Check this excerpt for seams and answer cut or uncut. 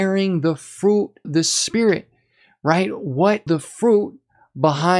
cut